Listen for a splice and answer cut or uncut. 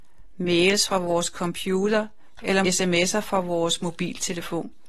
cut